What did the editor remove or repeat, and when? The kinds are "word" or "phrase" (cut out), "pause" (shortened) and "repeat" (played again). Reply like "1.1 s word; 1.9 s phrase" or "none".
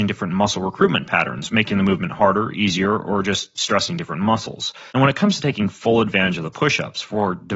4.9 s pause